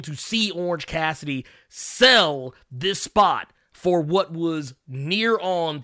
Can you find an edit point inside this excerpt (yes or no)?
no